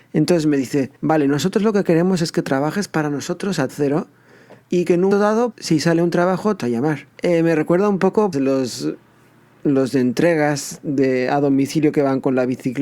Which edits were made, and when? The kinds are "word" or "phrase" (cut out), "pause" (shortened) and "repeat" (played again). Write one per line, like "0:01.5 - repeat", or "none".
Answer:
0:01.0 - pause
0:03.7 - word
0:04.6 - pause
0:05.1 - word
0:05.5 - word
0:06.6 - word
0:07.1 - pause
0:08.3 - word